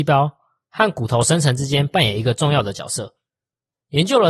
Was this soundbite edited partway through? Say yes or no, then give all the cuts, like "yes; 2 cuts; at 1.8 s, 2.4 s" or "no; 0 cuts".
no; 0 cuts